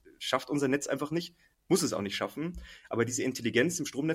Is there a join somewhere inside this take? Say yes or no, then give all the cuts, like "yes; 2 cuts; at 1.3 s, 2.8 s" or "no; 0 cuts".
no; 0 cuts